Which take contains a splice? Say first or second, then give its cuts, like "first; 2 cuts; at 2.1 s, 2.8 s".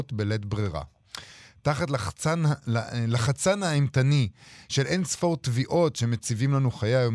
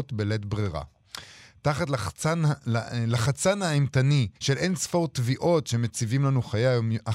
second; 1 cut; at 4.4 s